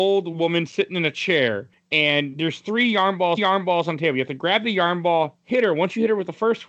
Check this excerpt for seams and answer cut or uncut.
cut